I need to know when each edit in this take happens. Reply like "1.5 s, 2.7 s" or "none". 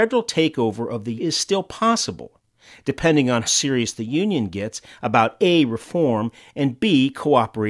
1.2 s, 3.5 s